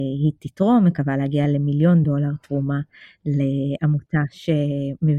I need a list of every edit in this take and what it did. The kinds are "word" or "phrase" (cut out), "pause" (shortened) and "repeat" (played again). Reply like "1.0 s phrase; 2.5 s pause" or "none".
none